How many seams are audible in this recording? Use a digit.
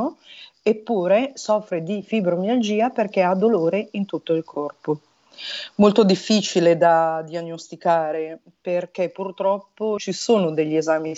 1